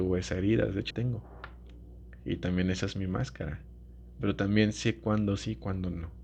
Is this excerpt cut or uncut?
cut